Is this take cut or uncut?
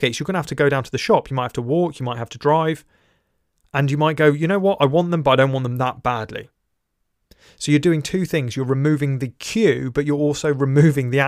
uncut